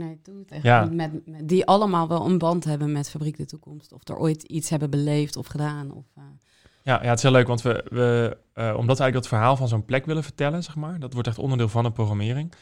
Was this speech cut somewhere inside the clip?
no; 0 cuts

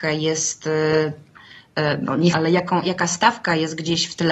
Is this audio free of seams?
no; 2 cuts; at 2.3 s, 2.8 s

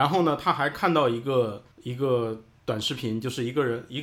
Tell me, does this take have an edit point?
yes; 1 cut; at 1.7 s

